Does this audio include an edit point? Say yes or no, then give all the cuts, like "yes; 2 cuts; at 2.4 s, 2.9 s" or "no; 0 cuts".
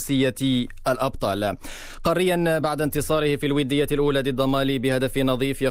no; 0 cuts